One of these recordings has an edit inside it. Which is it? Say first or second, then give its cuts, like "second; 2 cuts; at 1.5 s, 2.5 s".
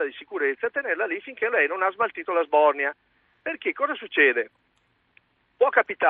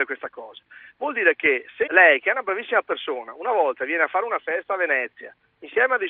second; 1 cut; at 1.9 s